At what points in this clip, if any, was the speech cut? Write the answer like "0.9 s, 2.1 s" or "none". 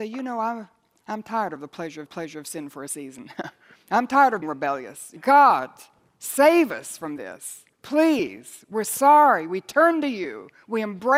2.1 s, 4.4 s, 5.2 s, 7.7 s